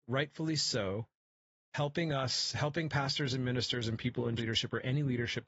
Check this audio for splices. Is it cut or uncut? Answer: cut